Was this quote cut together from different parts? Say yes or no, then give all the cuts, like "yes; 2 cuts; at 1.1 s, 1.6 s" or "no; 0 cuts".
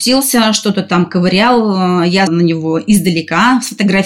yes; 1 cut; at 2.3 s